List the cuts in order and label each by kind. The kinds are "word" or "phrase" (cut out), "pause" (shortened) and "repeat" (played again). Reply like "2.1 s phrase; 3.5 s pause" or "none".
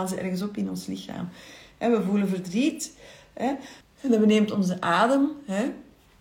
3.8 s pause